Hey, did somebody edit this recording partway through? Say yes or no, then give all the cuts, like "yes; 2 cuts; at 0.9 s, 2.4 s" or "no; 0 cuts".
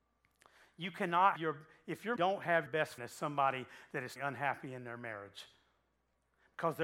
yes; 5 cuts; at 1.4 s, 2.2 s, 2.7 s, 3.0 s, 4.2 s